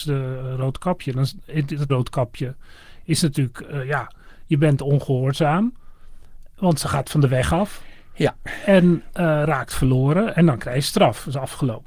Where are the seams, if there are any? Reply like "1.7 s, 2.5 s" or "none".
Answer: 1.9 s